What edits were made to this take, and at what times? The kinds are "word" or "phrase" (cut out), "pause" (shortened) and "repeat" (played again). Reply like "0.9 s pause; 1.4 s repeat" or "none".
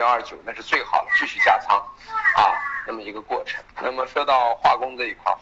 3.7 s pause